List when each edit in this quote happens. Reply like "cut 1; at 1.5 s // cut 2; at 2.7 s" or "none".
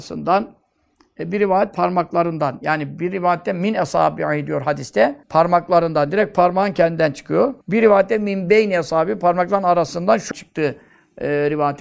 cut 1; at 5.2 s // cut 2; at 7.6 s // cut 3; at 10.3 s